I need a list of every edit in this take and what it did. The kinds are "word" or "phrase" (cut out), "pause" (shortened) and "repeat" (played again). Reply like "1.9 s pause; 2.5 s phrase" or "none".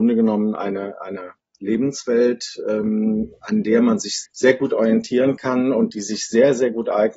4.2 s word